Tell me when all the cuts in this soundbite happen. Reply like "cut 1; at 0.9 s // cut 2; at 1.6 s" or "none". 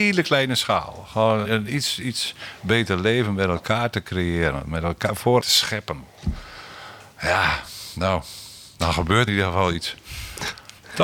cut 1; at 1.4 s // cut 2; at 5.4 s // cut 3; at 9.3 s